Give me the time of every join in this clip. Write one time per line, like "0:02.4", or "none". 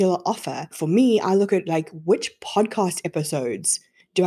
none